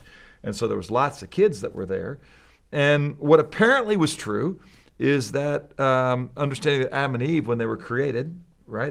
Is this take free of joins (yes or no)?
yes